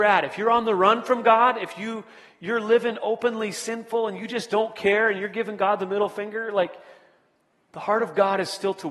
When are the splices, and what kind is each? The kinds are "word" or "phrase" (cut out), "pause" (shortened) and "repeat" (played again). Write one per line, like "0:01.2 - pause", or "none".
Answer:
none